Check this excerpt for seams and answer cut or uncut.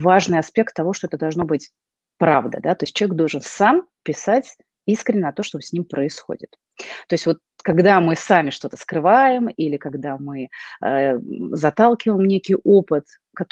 uncut